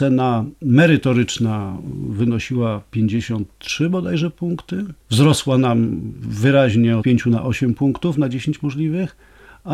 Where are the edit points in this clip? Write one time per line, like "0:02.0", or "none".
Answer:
0:05.0
0:07.0

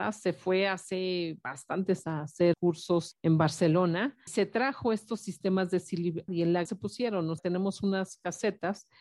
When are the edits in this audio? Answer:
0:02.0
0:02.5
0:03.1
0:04.3
0:06.3
0:06.7
0:07.4

